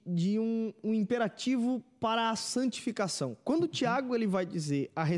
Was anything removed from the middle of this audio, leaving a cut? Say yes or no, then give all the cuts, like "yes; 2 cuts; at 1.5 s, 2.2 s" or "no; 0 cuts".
no; 0 cuts